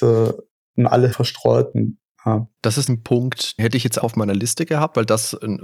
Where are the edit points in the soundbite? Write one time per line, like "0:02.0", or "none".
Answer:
0:01.1
0:02.9
0:03.6
0:04.0